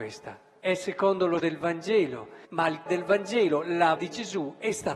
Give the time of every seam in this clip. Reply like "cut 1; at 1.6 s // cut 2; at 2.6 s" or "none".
cut 1; at 1.4 s // cut 2; at 2.4 s // cut 3; at 2.9 s // cut 4; at 4.0 s